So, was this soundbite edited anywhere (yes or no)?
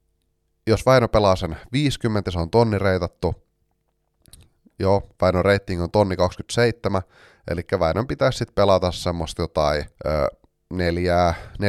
yes